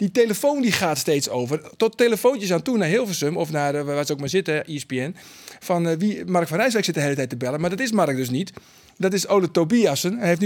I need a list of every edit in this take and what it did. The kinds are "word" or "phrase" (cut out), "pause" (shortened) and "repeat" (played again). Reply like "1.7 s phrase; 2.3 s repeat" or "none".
none